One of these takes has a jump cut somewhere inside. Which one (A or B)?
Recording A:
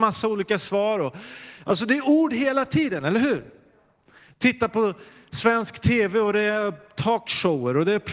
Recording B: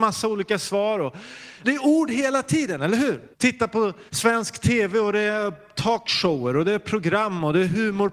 B